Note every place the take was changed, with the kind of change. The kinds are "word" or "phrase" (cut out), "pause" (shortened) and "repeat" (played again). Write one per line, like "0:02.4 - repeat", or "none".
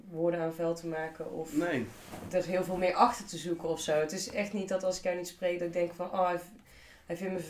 none